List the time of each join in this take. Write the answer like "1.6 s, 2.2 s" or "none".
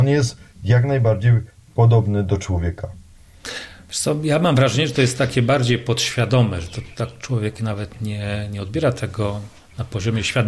none